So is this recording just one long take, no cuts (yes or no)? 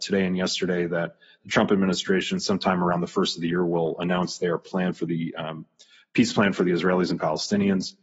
yes